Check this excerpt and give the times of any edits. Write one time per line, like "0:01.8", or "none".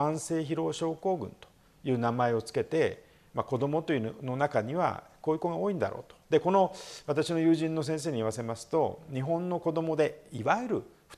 0:06.2